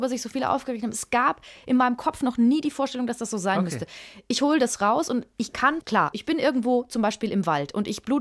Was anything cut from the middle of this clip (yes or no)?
yes